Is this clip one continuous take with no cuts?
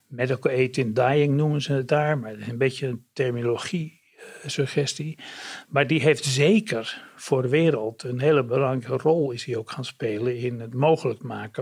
yes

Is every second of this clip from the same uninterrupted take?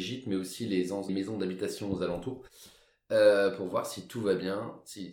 no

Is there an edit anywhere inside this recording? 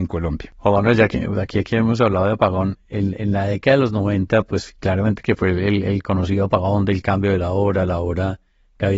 no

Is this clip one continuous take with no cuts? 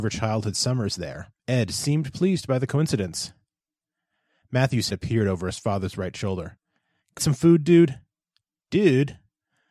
no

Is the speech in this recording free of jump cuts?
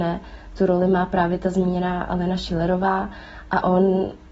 yes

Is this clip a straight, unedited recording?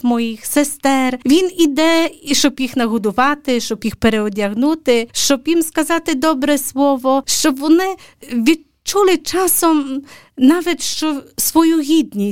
yes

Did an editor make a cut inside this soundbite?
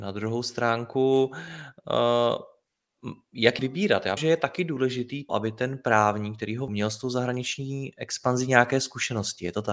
yes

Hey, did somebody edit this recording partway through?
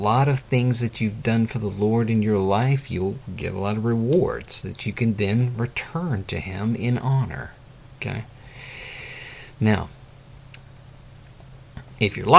no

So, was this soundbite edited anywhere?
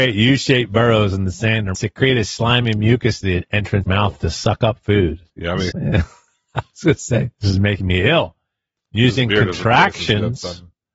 yes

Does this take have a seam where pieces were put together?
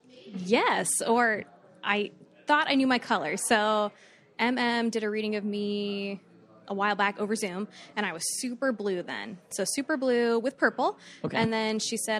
no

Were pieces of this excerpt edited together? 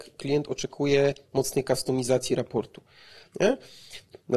no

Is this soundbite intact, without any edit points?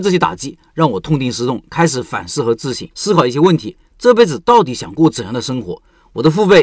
no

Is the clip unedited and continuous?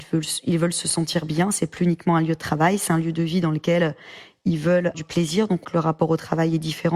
no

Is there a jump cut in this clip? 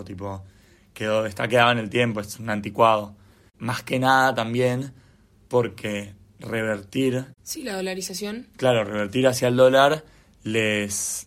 no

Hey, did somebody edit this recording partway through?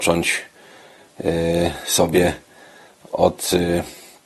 no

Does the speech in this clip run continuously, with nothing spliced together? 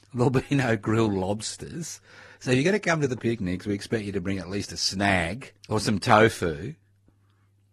no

